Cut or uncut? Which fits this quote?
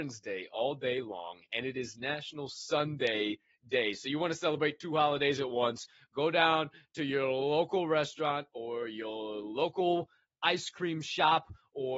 uncut